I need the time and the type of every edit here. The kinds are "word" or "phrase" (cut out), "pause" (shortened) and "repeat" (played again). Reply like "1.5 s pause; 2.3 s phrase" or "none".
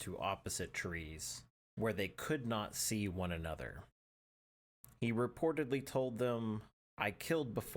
none